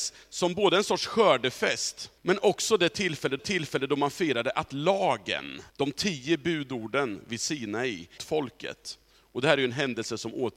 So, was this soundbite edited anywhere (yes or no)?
yes